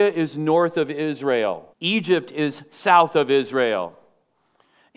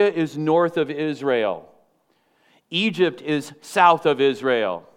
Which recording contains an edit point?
first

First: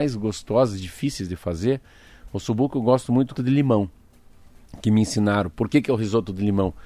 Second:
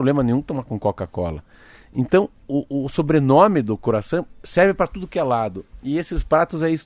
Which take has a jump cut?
first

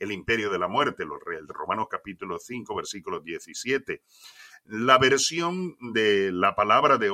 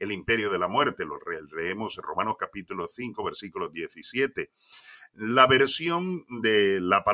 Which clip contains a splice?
first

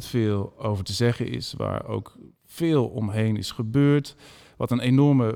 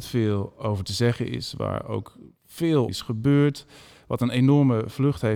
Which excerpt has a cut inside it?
second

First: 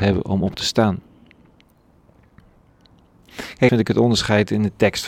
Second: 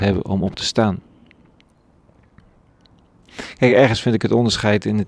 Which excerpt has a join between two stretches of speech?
first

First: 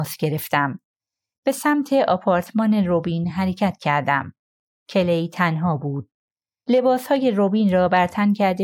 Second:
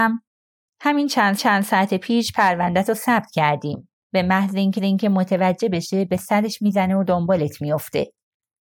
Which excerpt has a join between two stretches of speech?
second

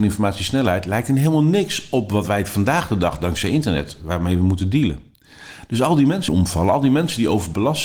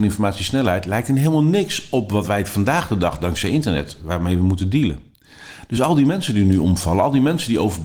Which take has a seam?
first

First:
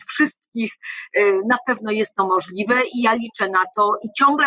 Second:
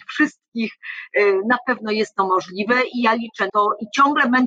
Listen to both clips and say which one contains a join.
second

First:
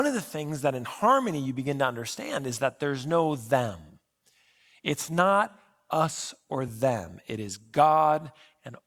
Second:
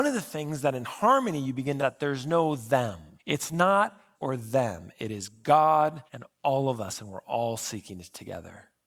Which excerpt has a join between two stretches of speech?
second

